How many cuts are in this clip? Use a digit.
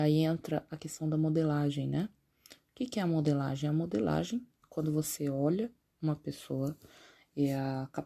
1